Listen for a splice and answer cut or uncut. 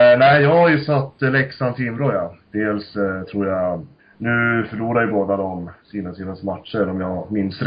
cut